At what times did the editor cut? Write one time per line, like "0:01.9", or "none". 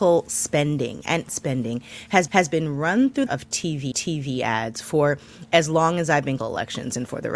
0:01.3
0:02.3
0:03.3
0:03.9
0:06.4